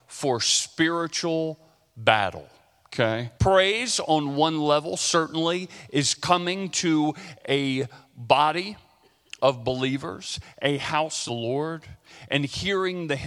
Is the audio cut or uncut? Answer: cut